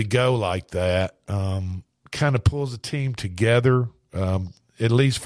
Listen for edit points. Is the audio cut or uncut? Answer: uncut